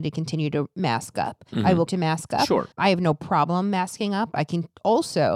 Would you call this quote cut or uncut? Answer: cut